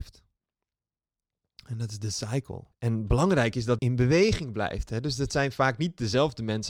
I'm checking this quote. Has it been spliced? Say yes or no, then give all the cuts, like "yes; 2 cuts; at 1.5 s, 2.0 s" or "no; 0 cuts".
yes; 2 cuts; at 2.7 s, 3.8 s